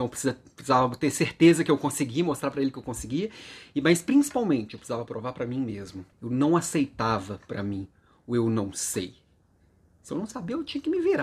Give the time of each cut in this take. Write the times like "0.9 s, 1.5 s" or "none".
6.1 s